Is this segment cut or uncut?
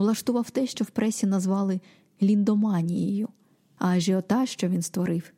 uncut